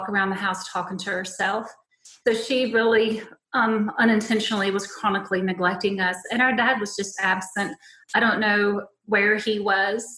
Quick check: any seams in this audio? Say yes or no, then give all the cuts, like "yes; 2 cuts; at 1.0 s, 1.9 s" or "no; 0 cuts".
no; 0 cuts